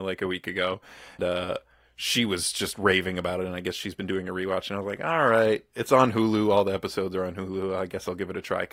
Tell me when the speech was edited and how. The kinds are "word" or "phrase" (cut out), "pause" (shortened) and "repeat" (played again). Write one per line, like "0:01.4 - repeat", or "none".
0:01.2 - word